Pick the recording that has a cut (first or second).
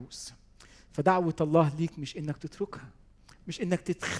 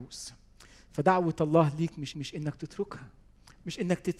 second